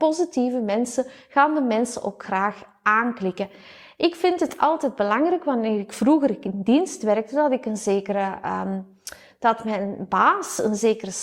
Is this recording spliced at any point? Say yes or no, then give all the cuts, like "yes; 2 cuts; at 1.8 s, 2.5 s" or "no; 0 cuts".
no; 0 cuts